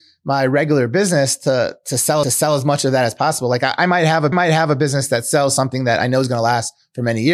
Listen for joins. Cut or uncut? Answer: cut